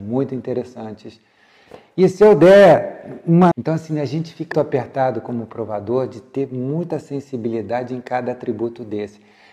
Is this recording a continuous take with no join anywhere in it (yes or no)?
no